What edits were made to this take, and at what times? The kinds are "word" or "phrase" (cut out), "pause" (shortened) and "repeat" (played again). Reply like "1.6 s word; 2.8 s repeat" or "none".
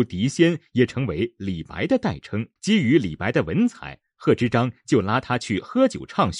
2.6 s pause